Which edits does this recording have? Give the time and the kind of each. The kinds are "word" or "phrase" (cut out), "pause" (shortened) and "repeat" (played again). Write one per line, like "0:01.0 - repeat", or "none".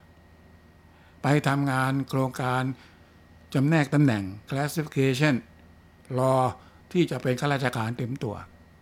0:04.5 - word